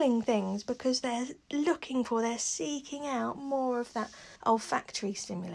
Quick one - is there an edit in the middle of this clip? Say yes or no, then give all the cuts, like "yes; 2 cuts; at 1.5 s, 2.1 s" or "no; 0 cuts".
yes; 1 cut; at 4.4 s